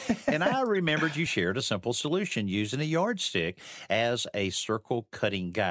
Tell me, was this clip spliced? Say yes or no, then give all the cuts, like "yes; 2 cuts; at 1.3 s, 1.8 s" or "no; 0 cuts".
no; 0 cuts